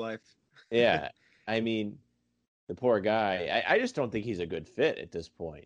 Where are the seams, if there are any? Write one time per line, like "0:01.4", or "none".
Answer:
none

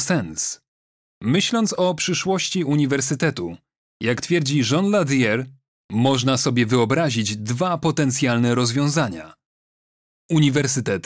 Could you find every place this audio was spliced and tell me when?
none

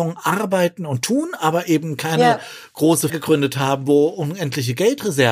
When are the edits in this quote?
0:03.1

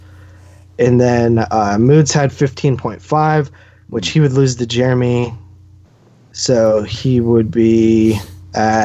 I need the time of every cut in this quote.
none

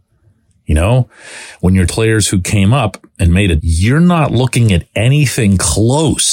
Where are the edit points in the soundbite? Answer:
0:01.9
0:03.6

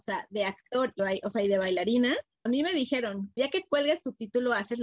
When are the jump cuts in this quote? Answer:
0:01.0
0:02.5
0:03.4

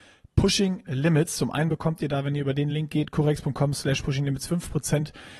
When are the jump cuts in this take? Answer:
none

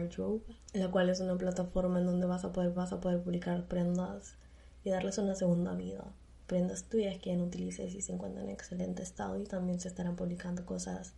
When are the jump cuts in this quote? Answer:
0:02.8

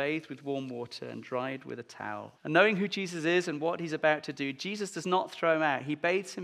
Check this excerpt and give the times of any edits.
0:02.3

